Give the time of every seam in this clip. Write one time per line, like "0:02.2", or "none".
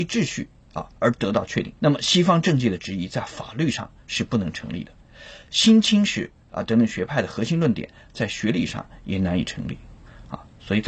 0:01.8